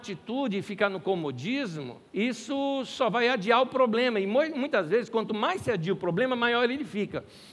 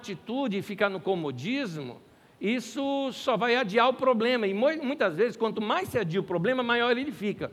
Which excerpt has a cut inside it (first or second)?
first